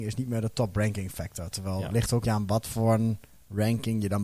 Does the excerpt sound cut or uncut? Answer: cut